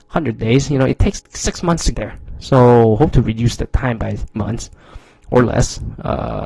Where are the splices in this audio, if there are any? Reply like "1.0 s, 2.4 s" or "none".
1.2 s, 1.9 s, 3.1 s, 4.4 s